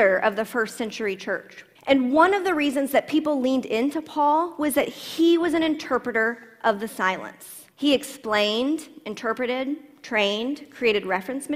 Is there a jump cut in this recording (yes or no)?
yes